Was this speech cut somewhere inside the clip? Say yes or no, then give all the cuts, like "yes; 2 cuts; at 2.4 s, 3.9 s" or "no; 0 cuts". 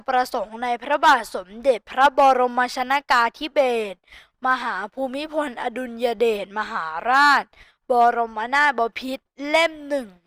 no; 0 cuts